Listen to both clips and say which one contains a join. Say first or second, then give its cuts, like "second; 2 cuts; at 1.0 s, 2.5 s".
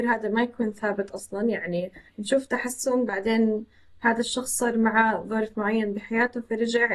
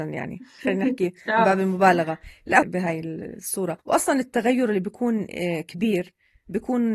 second; 2 cuts; at 2.6 s, 3.8 s